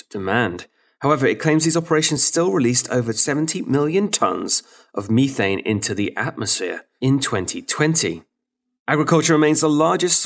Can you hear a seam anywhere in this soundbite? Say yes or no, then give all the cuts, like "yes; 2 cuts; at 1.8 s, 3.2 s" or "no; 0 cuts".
no; 0 cuts